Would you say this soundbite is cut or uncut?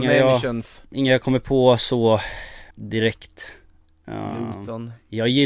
cut